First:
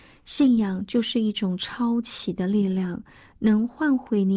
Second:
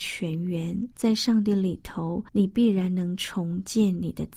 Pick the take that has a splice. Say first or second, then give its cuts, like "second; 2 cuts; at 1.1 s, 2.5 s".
second; 2 cuts; at 0.9 s, 2.3 s